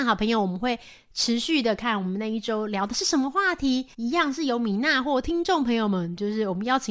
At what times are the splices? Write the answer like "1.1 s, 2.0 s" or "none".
3.9 s